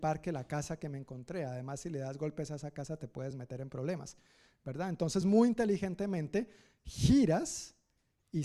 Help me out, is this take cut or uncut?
uncut